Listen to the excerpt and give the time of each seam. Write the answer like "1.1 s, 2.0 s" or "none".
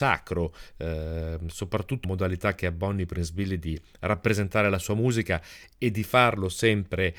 2.0 s